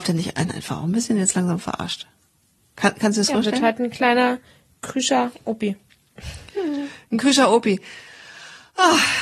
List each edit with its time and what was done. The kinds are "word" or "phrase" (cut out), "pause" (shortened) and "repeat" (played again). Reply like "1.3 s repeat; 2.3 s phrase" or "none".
none